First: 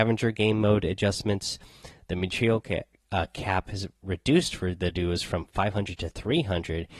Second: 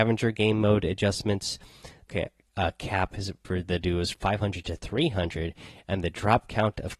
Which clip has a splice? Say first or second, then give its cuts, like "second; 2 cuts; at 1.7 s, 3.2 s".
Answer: second; 3 cuts; at 2.1 s, 3.4 s, 4.1 s